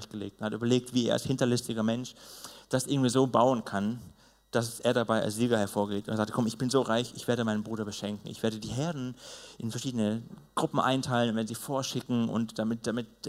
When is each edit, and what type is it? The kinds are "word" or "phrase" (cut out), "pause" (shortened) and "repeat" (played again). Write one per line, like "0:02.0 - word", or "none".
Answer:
none